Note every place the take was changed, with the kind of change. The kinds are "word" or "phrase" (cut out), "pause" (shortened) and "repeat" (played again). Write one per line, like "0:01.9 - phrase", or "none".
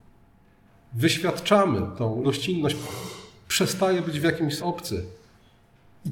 0:02.2 - word
0:04.6 - word